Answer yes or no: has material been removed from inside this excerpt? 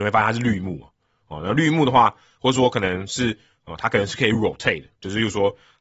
no